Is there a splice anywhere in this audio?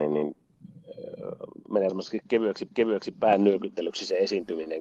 yes; 2 cuts; at 1.9 s, 2.7 s

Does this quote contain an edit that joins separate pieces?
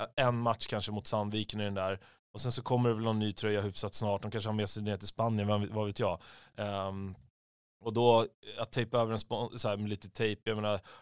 no; 0 cuts

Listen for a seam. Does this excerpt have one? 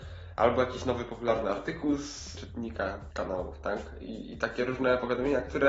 no; 0 cuts

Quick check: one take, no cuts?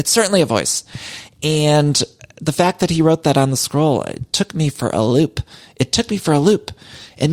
yes; 0 cuts

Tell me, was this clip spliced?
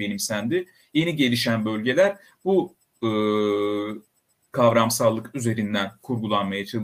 no; 0 cuts

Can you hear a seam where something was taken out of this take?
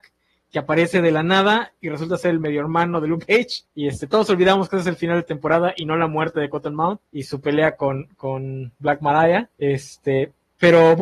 yes; 3 cuts; at 3.7 s, 7.1 s, 9.5 s

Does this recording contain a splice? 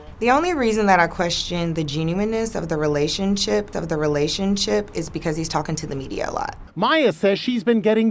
yes; 1 cut; at 3.7 s

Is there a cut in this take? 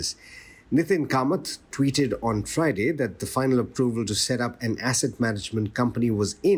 no; 0 cuts

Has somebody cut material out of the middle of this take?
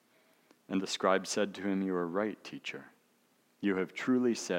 no; 0 cuts

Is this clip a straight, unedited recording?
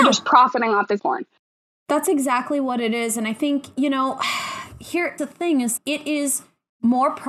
no; 3 cuts; at 1.0 s, 5.2 s, 5.8 s

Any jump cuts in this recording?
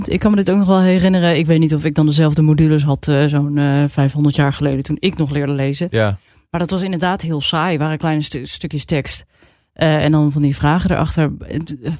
no; 0 cuts

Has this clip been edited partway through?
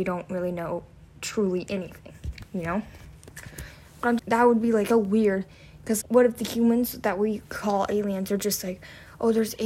yes; 3 cuts; at 4.2 s, 4.9 s, 6.0 s

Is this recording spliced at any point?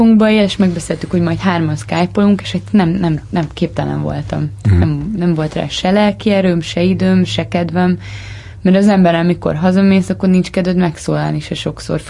no; 0 cuts

